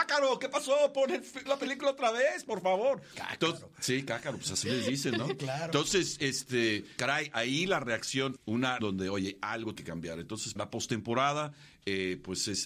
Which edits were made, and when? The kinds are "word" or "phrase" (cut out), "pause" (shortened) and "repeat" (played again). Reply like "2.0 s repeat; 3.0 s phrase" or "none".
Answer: 1.5 s word; 7.0 s word; 8.4 s word; 8.8 s word; 9.8 s word; 10.6 s word